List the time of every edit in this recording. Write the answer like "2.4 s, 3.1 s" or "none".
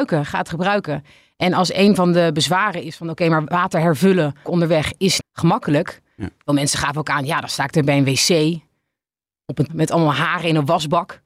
4.4 s, 5.2 s, 9.7 s

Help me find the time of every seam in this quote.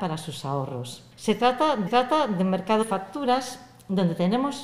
1.1 s, 1.9 s, 2.8 s

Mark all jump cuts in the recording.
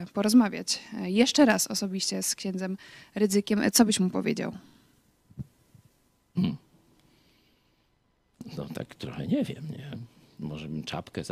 none

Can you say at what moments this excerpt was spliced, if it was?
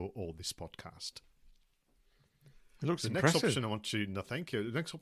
none

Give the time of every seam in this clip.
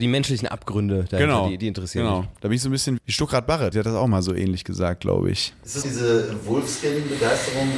3.0 s, 3.7 s, 5.8 s

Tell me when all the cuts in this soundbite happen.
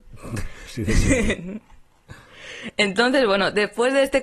none

